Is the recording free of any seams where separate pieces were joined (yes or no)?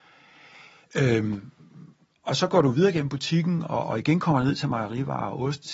yes